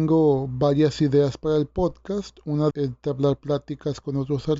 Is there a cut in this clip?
yes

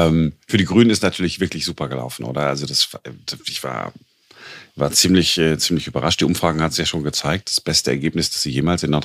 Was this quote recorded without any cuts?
yes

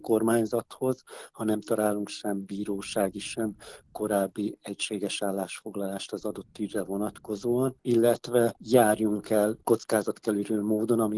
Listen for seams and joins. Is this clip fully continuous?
yes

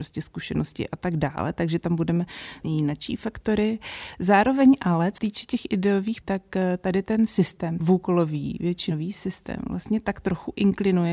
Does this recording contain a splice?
yes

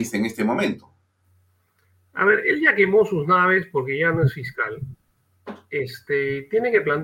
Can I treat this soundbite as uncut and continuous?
yes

